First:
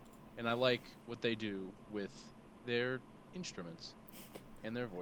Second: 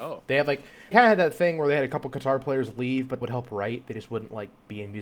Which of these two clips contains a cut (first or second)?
second